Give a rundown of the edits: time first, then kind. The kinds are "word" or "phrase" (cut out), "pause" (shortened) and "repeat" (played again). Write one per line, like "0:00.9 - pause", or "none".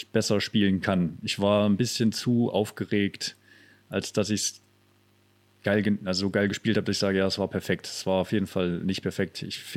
none